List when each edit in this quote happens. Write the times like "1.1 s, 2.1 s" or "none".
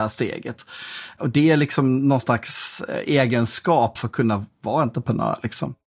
4.0 s